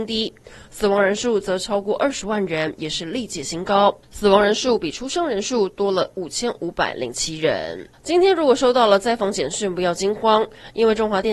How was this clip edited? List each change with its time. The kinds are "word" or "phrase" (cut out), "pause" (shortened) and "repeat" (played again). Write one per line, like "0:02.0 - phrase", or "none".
none